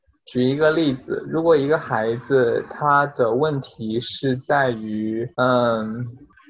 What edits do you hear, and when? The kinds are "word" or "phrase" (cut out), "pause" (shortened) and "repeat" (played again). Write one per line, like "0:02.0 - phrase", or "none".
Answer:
0:05.3 - pause

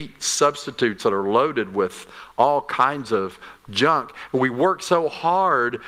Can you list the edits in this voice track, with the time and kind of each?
none

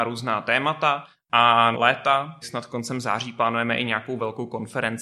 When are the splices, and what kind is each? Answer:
0:01.7 - phrase
0:02.4 - word

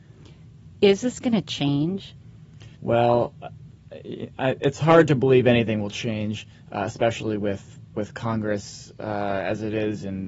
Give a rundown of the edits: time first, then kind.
0:02.7 - pause

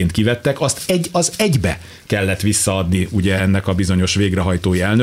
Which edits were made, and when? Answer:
none

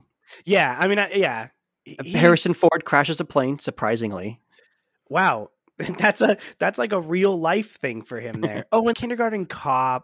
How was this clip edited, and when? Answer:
0:08.9 - word

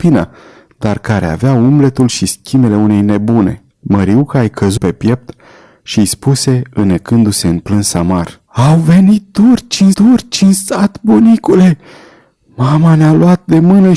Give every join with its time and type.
0:03.7 - pause
0:04.8 - word
0:08.5 - pause
0:09.9 - repeat

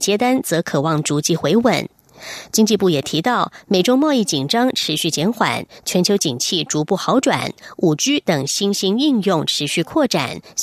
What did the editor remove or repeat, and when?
none

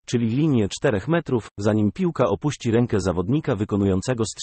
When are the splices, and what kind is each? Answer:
none

